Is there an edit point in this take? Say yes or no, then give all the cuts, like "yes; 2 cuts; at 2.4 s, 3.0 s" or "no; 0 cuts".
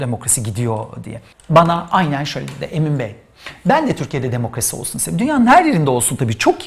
yes; 1 cut; at 1.3 s